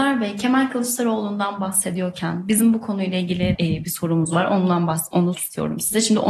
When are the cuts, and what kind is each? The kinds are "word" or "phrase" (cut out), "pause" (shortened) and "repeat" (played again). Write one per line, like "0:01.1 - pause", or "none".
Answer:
0:03.5 - word
0:05.3 - word